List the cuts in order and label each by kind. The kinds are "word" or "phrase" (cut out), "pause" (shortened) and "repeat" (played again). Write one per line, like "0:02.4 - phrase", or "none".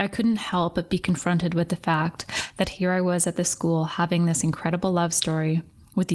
none